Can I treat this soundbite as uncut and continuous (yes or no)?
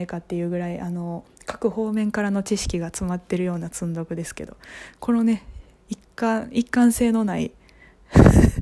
yes